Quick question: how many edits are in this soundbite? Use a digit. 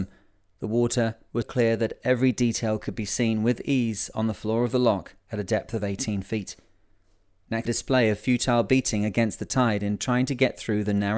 2